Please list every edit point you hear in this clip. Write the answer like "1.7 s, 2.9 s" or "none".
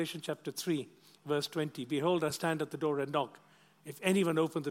none